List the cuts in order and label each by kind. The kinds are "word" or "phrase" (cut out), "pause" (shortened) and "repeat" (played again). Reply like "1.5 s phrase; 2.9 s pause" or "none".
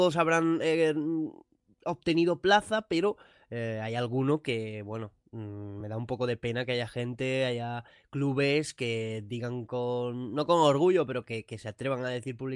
none